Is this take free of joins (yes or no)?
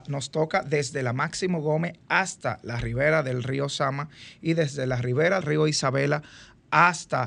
no